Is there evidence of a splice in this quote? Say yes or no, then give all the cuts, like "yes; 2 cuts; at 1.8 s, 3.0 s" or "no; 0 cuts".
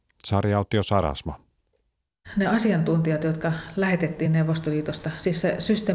no; 0 cuts